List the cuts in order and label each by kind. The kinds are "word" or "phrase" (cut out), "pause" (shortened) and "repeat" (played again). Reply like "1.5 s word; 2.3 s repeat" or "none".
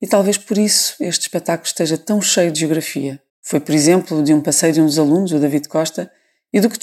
3.3 s pause